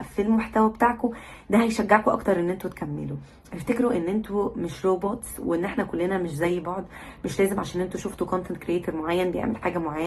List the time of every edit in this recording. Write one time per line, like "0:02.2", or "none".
none

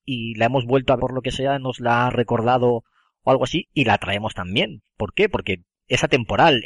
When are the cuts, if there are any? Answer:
0:01.0
0:02.1

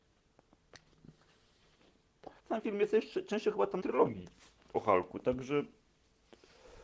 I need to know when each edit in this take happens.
0:02.4
0:03.8

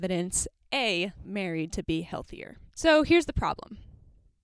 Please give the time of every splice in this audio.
0:01.2
0:02.7

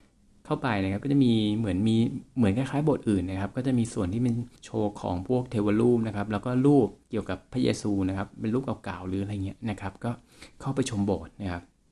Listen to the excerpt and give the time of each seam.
0:02.3
0:04.6
0:07.0

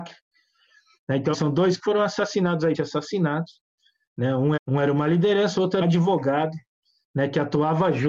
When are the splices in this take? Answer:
0:01.3
0:01.8
0:02.7
0:04.6
0:05.8

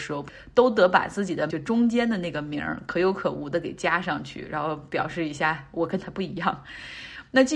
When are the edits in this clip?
0:01.5

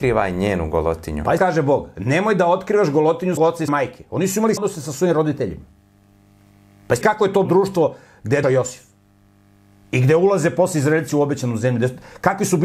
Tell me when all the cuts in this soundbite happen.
0:01.4
0:03.4
0:03.7
0:04.6
0:07.0
0:07.4
0:08.4

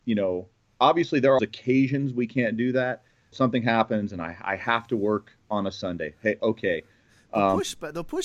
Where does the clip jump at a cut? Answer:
0:01.4
0:03.3
0:06.4

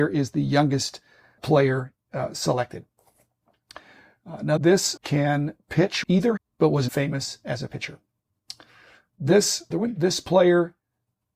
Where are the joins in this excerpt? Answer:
0:01.4
0:04.6
0:05.0
0:06.0
0:06.4
0:06.9
0:09.7

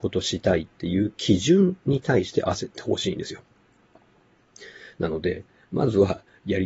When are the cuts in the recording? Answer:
none

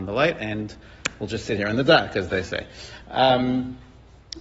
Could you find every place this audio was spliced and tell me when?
none

